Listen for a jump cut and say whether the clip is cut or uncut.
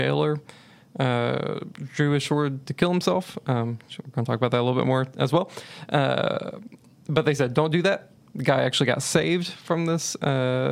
uncut